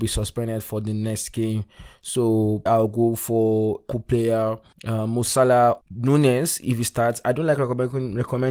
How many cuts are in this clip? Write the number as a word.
four